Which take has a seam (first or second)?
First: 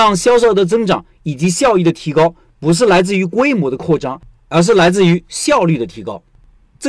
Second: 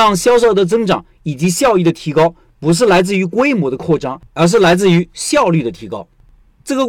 second